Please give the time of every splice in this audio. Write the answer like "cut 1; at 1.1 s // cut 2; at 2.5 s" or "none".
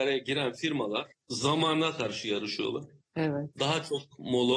cut 1; at 1.1 s